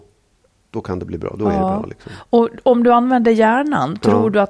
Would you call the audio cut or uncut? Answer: uncut